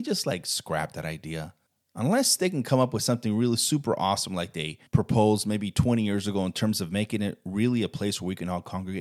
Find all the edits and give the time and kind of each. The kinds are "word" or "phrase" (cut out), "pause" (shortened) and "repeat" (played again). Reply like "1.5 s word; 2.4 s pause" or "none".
1.7 s pause; 4.9 s pause